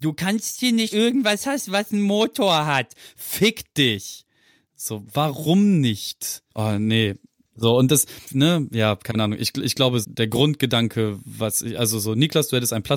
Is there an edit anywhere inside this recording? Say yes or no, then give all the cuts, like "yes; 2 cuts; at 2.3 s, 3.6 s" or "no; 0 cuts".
yes; 4 cuts; at 0.9 s, 6.5 s, 8.2 s, 10.0 s